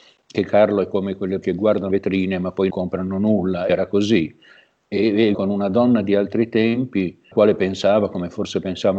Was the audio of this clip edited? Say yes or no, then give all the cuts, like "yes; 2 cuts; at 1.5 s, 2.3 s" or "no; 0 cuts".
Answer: yes; 6 cuts; at 1.4 s, 1.9 s, 2.7 s, 3.7 s, 5.3 s, 7.3 s